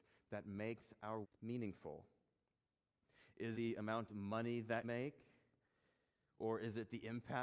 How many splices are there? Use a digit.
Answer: 4